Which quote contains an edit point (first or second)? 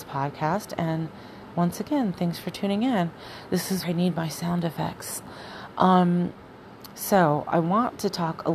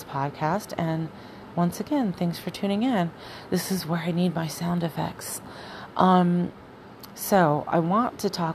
first